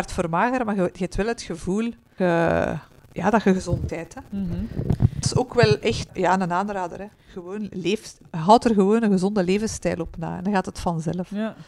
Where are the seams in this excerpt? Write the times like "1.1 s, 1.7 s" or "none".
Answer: 2.2 s, 3.9 s, 5.2 s, 6.1 s